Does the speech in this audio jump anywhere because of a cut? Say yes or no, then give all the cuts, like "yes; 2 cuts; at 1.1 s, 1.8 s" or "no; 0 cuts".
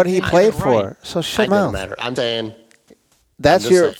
yes; 2 cuts; at 1.5 s, 2.2 s